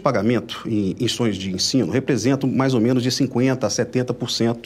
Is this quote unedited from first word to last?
yes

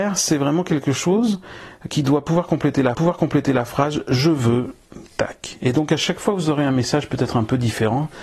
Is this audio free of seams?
no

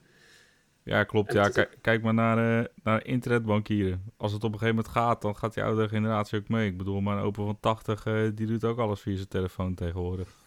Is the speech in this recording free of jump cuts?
yes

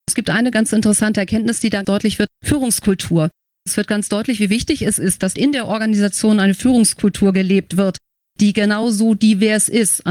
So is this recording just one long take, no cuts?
yes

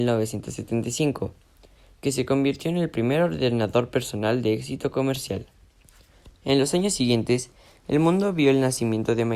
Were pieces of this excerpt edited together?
no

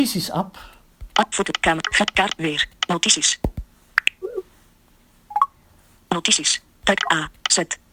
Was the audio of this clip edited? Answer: no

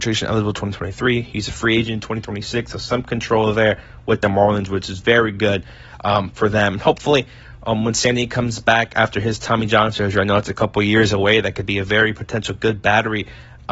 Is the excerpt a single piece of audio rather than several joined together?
yes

